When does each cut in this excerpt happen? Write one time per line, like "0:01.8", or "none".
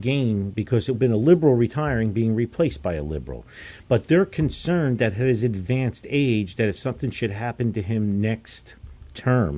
0:00.9